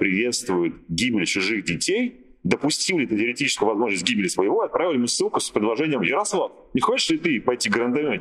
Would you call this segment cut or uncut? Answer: uncut